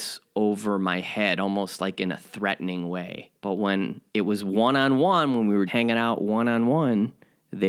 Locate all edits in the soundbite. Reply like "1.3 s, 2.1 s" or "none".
3.4 s, 4.1 s, 5.7 s